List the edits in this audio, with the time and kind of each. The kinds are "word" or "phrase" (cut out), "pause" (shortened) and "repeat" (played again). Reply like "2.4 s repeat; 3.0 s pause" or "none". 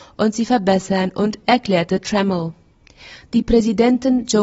1.4 s word